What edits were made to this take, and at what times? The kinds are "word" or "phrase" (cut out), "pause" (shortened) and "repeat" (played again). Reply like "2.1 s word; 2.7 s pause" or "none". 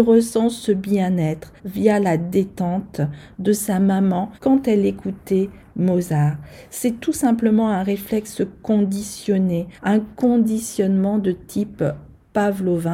1.6 s pause; 4.3 s pause; 9.8 s pause

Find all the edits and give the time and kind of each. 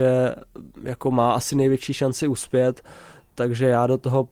none

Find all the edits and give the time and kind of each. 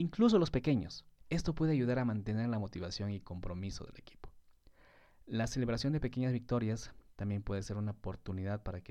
1.2 s pause

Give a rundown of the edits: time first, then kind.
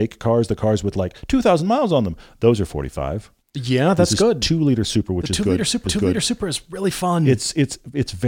3.4 s pause; 5.9 s repeat

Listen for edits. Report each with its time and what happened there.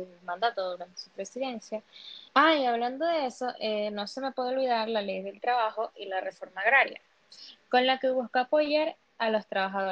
2.3 s pause

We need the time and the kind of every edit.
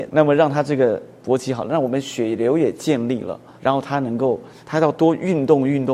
3.6 s pause; 4.6 s pause

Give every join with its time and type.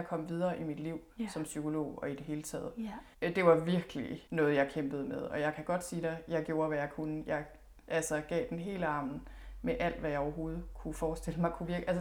3.1 s pause; 4.3 s pause

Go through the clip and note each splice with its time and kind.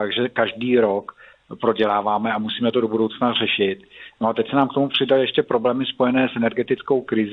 none

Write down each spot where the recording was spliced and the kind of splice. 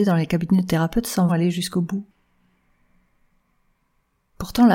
1.3 s word

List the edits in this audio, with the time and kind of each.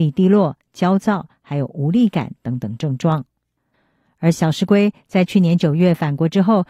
none

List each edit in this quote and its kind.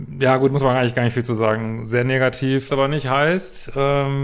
2.7 s word

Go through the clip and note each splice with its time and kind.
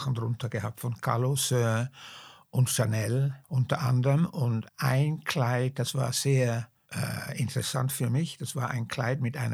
3.4 s pause; 4.7 s pause

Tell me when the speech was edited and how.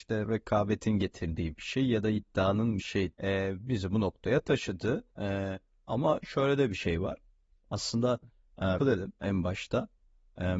2.8 s word; 3.1 s word; 5.1 s pause; 8.8 s phrase

